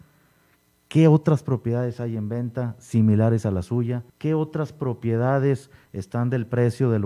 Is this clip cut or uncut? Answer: cut